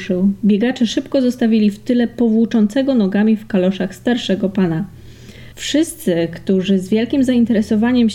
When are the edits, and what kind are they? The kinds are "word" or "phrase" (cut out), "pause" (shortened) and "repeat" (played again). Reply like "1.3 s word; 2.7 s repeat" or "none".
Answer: 5.5 s pause